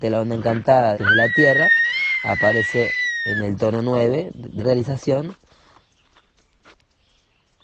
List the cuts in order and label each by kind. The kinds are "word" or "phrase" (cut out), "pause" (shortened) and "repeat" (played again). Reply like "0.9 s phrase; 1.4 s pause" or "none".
0.9 s phrase; 4.6 s word